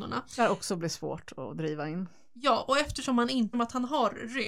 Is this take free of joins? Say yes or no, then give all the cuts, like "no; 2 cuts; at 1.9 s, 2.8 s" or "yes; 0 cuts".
no; 1 cut; at 3.5 s